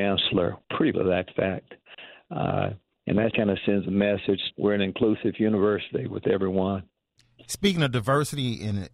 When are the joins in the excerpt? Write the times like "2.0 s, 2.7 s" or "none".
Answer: 0.9 s, 3.3 s, 4.5 s